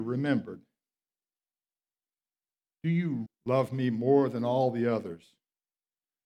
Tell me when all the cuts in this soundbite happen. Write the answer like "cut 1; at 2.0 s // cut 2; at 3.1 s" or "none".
cut 1; at 3.3 s